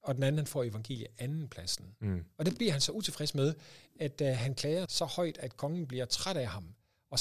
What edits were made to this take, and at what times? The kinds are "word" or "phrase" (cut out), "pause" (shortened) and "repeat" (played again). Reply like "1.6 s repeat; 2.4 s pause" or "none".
4.9 s word